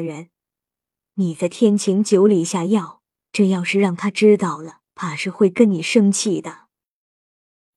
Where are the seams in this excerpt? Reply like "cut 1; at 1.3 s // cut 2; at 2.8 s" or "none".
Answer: cut 1; at 3.2 s // cut 2; at 4.9 s